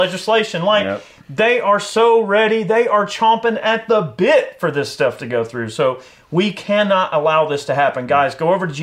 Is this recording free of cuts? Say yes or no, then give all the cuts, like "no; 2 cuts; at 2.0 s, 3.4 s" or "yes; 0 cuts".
yes; 0 cuts